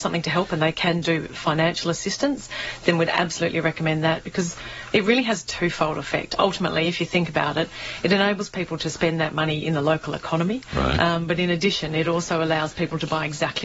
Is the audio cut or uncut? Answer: uncut